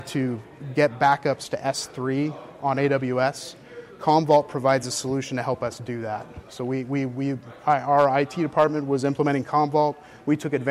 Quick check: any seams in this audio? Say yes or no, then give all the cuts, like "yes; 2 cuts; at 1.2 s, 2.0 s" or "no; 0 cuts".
no; 0 cuts